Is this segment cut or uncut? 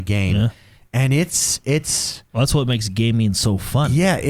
uncut